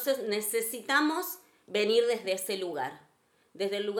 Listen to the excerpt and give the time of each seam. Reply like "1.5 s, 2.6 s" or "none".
none